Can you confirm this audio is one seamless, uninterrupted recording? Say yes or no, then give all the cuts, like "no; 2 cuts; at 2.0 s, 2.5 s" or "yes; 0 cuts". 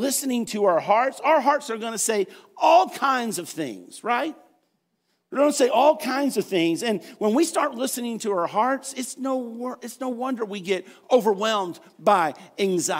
yes; 0 cuts